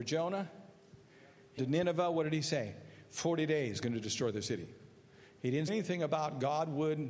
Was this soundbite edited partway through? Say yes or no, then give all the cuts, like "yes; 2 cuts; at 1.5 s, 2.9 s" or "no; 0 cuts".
yes; 3 cuts; at 1.6 s, 3.8 s, 5.7 s